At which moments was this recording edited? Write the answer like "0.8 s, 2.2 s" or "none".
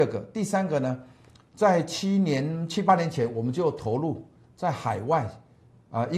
none